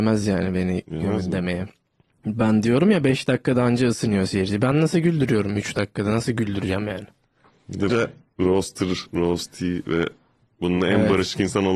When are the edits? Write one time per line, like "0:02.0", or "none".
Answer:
0:07.9
0:09.1